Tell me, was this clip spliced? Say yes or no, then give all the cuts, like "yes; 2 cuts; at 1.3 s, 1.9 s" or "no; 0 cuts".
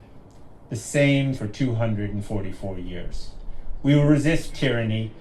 yes; 1 cut; at 1.4 s